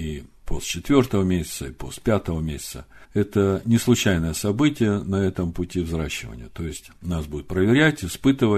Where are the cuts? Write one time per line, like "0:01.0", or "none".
0:03.0